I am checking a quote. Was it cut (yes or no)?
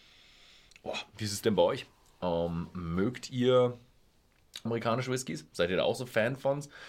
yes